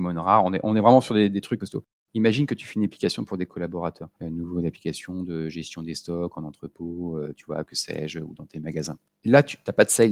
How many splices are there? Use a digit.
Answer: 0